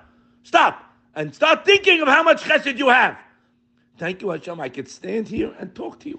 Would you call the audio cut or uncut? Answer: uncut